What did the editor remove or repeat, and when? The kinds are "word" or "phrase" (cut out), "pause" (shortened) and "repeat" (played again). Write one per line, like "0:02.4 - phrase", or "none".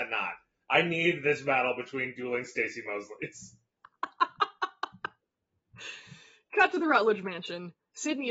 none